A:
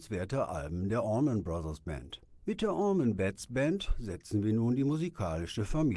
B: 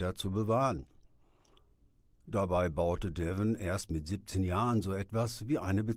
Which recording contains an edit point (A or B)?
A